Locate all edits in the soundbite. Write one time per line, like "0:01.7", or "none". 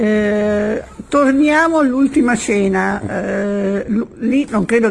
none